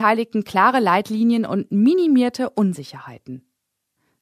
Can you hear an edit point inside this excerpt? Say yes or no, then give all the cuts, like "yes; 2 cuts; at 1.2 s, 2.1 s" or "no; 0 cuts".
no; 0 cuts